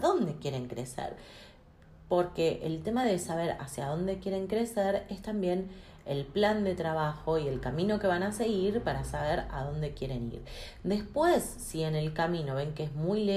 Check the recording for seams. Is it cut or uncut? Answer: uncut